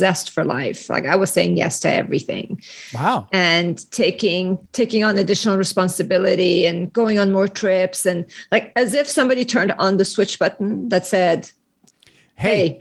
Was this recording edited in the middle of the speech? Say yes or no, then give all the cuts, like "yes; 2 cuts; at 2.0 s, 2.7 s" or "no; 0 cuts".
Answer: yes; 1 cut; at 4.7 s